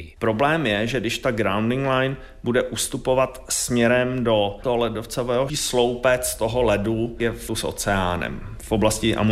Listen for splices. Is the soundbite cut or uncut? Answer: cut